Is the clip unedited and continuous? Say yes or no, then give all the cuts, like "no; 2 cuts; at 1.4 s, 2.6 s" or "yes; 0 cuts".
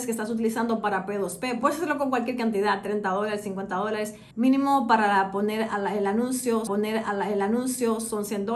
no; 3 cuts; at 1.6 s, 4.3 s, 6.7 s